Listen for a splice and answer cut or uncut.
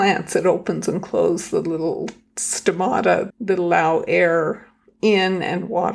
cut